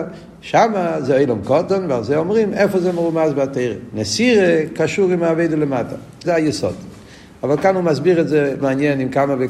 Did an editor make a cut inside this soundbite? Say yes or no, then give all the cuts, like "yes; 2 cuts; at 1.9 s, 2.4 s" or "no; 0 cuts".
yes; 2 cuts; at 6.2 s, 8.6 s